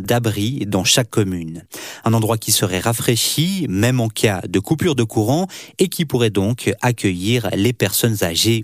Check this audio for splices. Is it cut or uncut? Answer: uncut